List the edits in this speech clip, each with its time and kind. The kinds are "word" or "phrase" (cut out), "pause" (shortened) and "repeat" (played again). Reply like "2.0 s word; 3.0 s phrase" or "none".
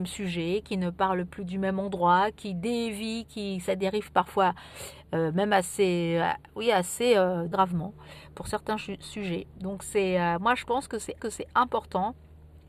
7.5 s phrase; 11.2 s repeat